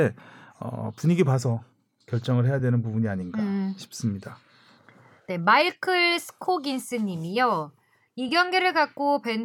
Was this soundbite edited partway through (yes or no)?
no